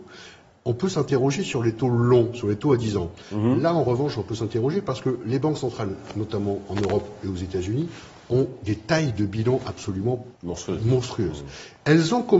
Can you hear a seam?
yes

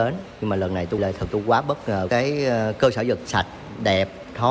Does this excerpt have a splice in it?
yes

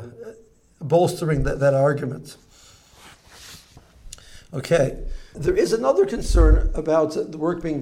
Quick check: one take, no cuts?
no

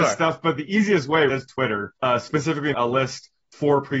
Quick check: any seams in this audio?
yes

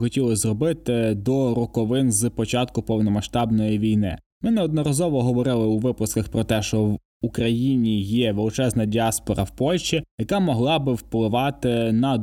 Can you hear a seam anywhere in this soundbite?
no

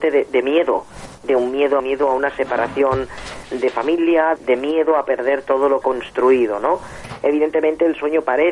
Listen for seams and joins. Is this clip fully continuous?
no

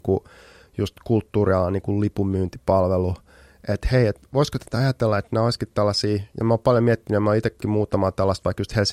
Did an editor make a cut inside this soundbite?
yes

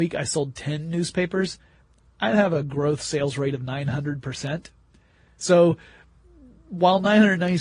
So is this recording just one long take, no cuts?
yes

